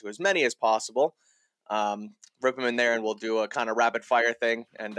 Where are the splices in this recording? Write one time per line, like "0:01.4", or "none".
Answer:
none